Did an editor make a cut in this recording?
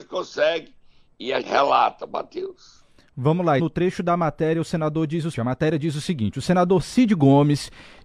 yes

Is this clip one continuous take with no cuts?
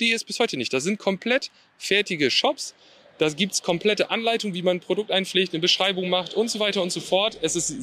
yes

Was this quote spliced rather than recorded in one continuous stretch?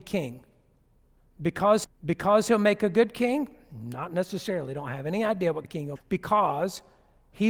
yes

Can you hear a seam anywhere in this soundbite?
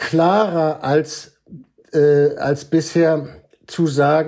no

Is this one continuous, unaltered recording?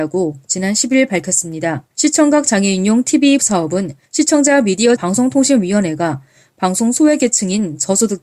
no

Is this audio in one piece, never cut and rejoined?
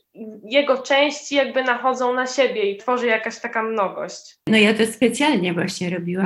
no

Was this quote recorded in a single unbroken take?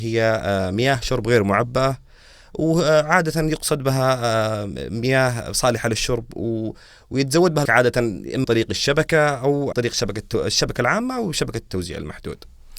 no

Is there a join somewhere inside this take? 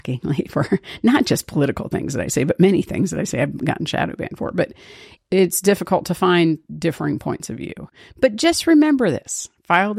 no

